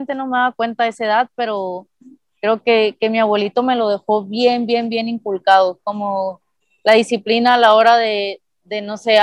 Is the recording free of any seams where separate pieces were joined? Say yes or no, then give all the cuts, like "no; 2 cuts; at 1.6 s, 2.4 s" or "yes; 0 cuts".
yes; 0 cuts